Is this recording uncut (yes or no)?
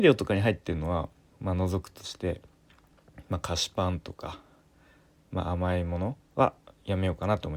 no